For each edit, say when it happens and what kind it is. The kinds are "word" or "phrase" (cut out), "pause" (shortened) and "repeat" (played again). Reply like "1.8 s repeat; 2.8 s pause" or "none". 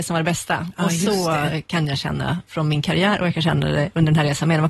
none